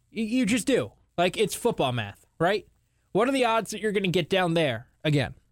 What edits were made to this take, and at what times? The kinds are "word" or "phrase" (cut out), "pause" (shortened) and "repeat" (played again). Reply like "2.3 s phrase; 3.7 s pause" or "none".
none